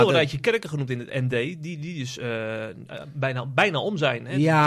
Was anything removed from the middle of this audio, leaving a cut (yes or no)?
no